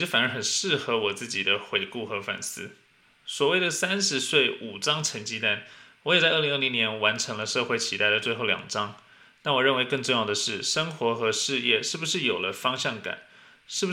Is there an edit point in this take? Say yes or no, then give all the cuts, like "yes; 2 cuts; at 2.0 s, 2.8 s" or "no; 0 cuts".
no; 0 cuts